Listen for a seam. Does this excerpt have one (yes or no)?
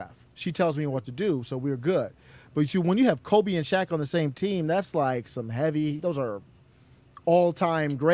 no